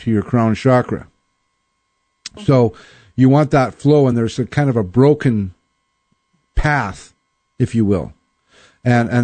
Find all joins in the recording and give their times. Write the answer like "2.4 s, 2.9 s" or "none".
none